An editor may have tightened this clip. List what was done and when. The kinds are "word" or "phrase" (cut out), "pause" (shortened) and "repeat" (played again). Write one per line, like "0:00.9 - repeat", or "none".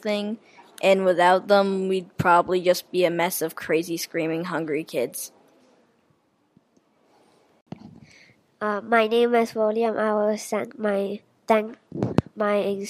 none